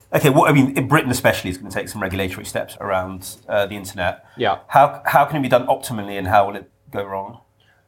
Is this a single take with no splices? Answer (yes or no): yes